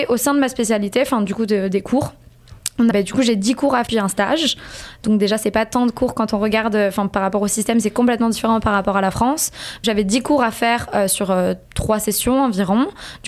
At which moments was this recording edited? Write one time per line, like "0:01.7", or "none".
0:02.9
0:03.9
0:09.8
0:11.6